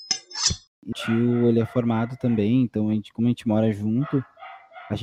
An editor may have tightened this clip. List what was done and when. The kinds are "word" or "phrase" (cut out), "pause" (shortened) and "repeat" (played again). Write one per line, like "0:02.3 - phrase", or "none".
0:00.9 - word